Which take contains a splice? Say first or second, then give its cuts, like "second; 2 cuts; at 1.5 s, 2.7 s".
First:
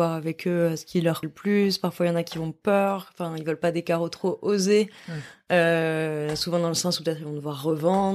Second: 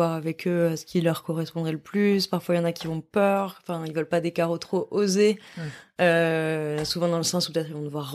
first; 1 cut; at 1.2 s